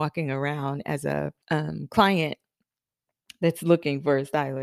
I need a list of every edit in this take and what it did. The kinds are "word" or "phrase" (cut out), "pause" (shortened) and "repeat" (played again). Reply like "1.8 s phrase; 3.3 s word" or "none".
1.4 s pause